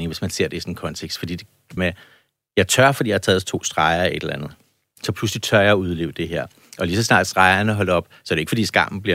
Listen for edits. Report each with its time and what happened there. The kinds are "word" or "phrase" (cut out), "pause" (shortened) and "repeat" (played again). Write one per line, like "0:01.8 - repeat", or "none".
0:01.8 - phrase